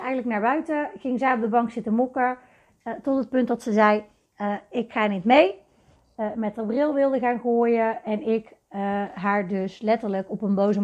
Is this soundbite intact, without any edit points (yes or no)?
yes